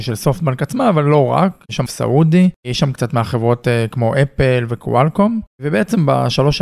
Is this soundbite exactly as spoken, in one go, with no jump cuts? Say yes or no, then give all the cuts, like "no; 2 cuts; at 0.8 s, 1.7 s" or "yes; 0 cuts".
no; 1 cut; at 1.9 s